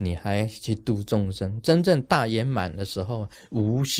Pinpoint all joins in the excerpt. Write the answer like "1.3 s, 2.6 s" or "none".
none

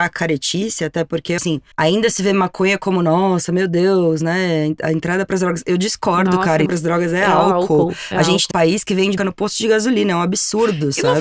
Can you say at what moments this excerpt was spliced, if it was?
1.4 s, 1.7 s, 6.7 s, 8.5 s, 9.2 s

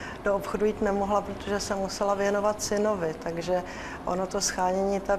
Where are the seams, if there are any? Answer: none

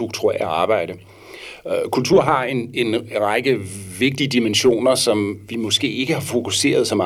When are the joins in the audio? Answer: none

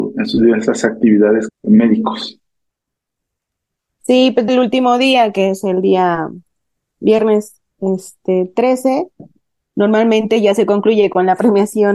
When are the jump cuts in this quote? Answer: 1.5 s, 4.5 s, 7.7 s

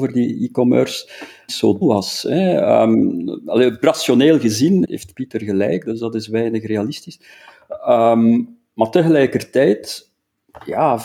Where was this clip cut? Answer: 1.5 s, 1.8 s, 3.8 s, 4.8 s

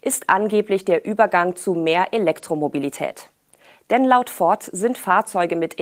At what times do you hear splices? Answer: none

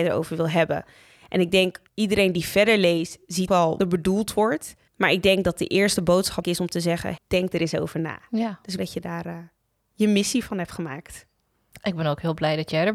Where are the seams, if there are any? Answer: 1.9 s, 3.5 s, 3.8 s, 4.9 s, 6.4 s, 7.2 s, 8.8 s, 9.6 s

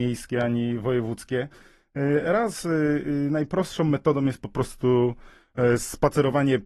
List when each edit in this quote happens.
none

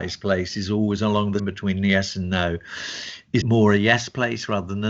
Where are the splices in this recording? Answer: 1.4 s, 3.4 s

